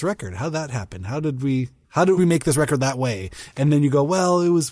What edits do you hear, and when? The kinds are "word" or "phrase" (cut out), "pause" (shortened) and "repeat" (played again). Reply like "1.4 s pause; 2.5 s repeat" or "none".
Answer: 1.8 s pause; 2.2 s phrase